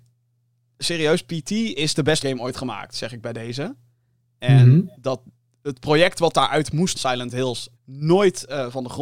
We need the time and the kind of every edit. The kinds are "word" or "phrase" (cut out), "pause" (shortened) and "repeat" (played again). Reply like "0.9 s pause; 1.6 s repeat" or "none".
2.2 s word; 6.9 s word; 7.8 s word